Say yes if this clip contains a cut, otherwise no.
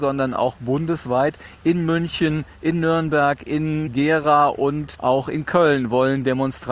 no